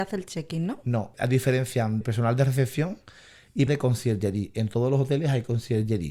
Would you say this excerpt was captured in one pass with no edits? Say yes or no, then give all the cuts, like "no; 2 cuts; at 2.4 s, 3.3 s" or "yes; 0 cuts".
no; 3 cuts; at 1.1 s, 2.0 s, 3.7 s